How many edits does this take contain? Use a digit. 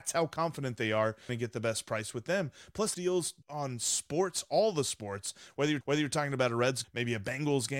5